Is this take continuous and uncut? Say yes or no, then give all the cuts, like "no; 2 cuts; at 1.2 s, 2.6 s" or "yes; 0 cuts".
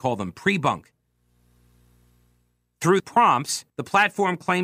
no; 2 cuts; at 3.0 s, 3.7 s